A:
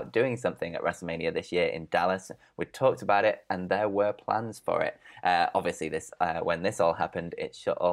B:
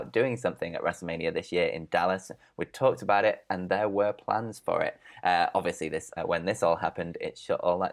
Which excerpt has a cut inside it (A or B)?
B